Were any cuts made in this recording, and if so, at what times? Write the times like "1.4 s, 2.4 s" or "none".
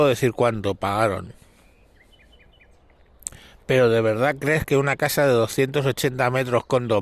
none